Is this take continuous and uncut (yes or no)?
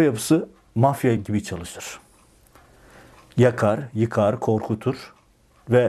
yes